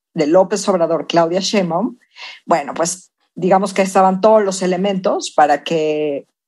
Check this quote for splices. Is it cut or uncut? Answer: uncut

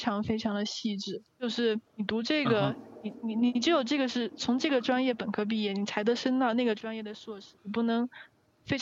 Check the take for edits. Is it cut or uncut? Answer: cut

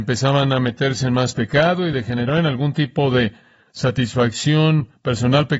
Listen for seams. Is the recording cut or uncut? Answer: uncut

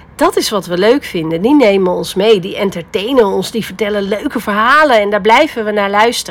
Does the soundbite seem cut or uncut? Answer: uncut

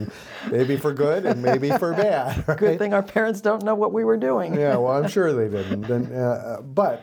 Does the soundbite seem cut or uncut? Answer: uncut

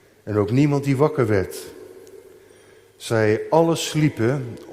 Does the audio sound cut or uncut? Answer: uncut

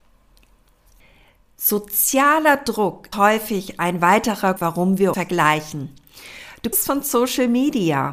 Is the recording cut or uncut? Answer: cut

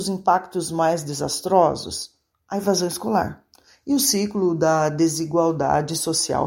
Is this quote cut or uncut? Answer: uncut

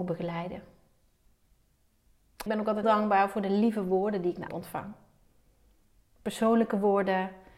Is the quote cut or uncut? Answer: cut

